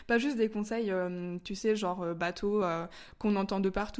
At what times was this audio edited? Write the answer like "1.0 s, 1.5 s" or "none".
none